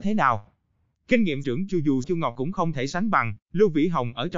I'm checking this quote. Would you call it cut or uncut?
cut